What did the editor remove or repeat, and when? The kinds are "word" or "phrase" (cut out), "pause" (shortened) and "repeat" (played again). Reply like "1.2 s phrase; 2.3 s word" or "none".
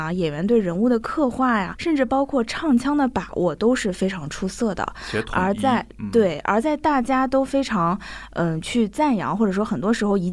1.8 s word